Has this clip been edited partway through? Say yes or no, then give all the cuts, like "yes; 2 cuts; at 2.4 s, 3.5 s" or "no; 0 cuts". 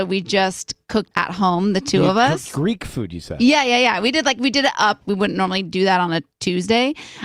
yes; 2 cuts; at 1.1 s, 5.0 s